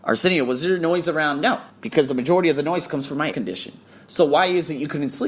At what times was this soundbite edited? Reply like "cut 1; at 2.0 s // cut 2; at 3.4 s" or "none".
cut 1; at 1.7 s // cut 2; at 3.3 s